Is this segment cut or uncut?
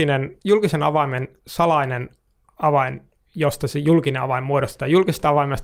uncut